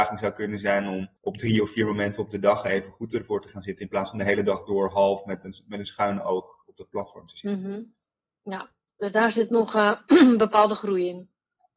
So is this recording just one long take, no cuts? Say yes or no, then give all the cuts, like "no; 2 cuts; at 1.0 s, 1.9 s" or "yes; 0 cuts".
no; 1 cut; at 1.2 s